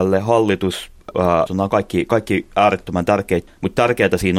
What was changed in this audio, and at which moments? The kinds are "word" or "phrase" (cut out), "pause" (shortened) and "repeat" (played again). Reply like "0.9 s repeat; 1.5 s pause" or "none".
1.1 s word; 1.5 s word; 3.5 s word